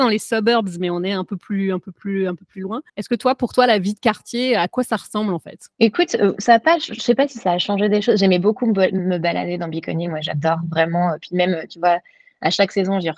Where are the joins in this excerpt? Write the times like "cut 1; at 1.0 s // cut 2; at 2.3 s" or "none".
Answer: cut 1; at 2.9 s // cut 2; at 5.7 s